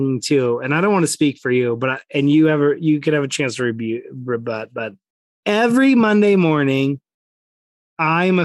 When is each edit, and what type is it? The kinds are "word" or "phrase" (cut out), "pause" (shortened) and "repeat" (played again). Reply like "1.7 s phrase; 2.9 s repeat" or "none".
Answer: 5.1 s pause

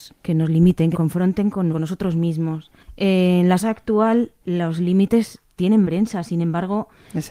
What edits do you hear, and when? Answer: 0.9 s word; 1.7 s word; 3.6 s word; 4.4 s word; 5.8 s word

